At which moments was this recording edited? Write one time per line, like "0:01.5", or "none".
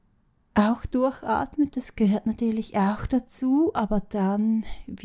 none